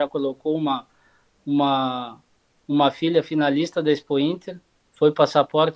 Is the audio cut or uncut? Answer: uncut